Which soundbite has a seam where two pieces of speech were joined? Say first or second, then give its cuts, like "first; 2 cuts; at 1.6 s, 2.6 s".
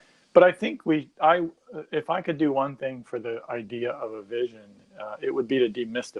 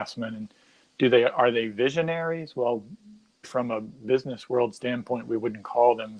second; 1 cut; at 3.4 s